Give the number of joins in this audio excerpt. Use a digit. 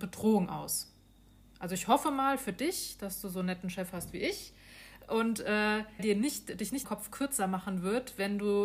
2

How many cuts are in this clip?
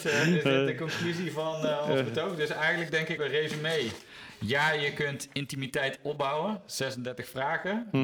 1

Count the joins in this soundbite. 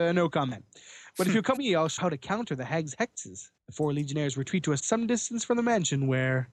4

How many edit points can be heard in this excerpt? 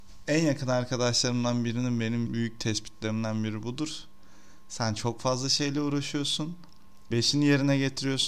2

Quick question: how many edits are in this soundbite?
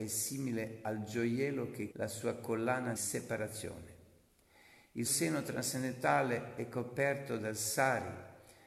3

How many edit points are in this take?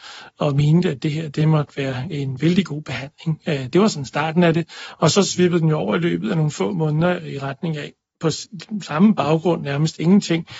0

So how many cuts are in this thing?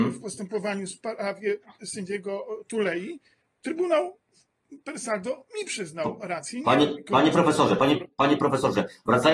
0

